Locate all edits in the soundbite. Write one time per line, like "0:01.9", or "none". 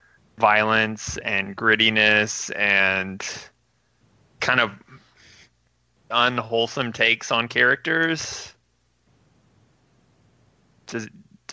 0:04.4
0:06.1